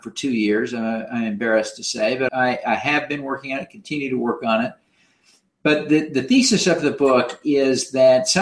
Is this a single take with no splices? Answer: no; 1 cut; at 2.3 s

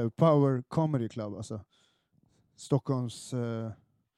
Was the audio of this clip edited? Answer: no; 0 cuts

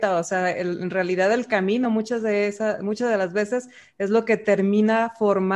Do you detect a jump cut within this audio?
no; 0 cuts

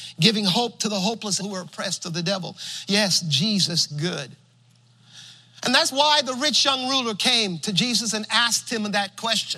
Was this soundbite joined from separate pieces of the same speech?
yes; 3 cuts; at 1.4 s, 3.9 s, 5.9 s

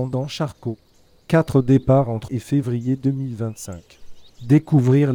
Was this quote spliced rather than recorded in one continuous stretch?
yes; 1 cut; at 2.3 s

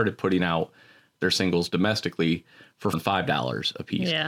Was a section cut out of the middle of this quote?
yes; 1 cut; at 2.9 s

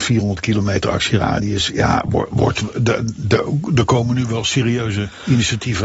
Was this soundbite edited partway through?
no; 0 cuts

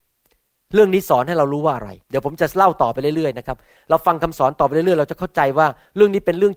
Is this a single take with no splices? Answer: no; 1 cut; at 2.0 s

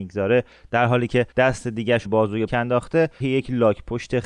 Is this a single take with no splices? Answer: no; 4 cuts; at 1.3 s, 2.0 s, 2.5 s, 3.2 s

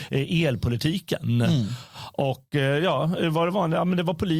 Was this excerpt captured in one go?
yes; 0 cuts

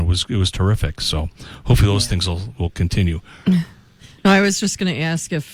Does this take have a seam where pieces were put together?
no; 0 cuts

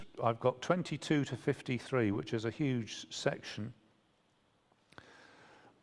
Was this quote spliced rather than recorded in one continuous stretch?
no; 0 cuts

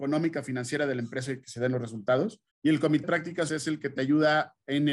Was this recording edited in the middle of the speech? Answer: yes; 3 cuts; at 2.5 s, 3.0 s, 3.5 s

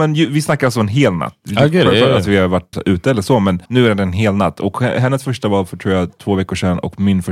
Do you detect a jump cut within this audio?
yes; 2 cuts; at 2.7 s, 3.7 s

